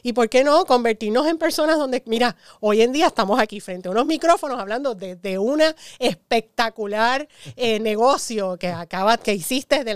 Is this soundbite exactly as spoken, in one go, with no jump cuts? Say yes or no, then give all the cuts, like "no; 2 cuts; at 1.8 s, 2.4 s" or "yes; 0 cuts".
yes; 0 cuts